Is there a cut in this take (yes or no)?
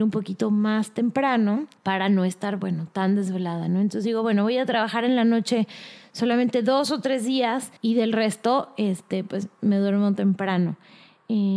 yes